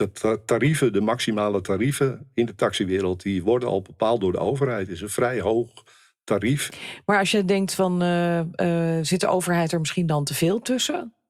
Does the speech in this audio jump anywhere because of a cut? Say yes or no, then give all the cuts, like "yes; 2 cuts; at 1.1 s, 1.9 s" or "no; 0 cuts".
no; 0 cuts